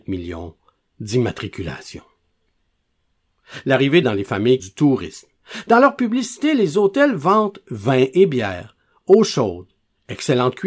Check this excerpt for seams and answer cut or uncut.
cut